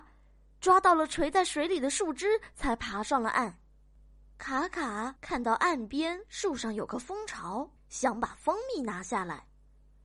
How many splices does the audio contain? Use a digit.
2